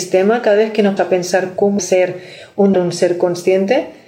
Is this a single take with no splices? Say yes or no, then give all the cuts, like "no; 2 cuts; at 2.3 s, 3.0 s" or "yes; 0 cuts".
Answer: no; 3 cuts; at 1.0 s, 1.8 s, 2.7 s